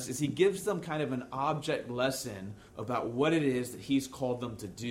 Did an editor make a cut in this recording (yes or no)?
yes